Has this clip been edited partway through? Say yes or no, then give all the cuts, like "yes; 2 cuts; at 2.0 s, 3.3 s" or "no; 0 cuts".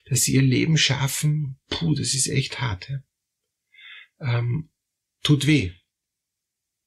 no; 0 cuts